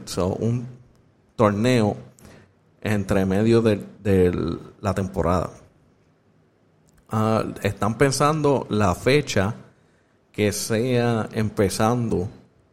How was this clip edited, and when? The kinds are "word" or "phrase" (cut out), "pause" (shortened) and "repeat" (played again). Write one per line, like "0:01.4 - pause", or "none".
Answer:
none